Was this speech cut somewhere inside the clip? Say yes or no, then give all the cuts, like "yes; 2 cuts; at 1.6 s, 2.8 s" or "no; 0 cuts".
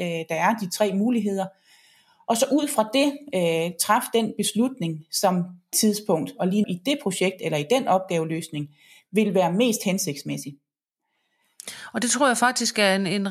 yes; 2 cuts; at 5.7 s, 6.6 s